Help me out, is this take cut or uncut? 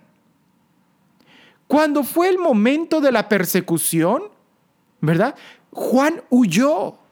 uncut